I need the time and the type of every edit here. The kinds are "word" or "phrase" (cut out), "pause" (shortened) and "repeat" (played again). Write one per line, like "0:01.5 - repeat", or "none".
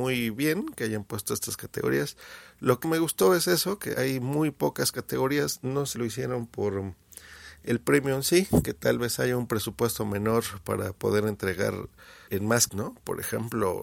0:02.8 - word
0:03.9 - word
0:06.0 - word
0:12.3 - word
0:12.7 - word